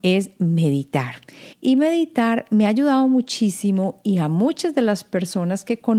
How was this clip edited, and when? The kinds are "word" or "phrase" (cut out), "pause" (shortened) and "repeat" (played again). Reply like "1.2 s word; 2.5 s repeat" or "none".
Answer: 1.5 s pause